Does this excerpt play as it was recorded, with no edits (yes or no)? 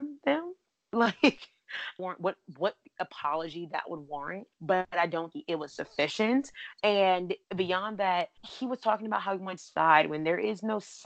no